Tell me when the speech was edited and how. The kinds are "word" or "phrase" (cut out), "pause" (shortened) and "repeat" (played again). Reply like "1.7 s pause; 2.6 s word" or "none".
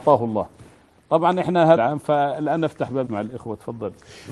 1.8 s phrase; 3.1 s word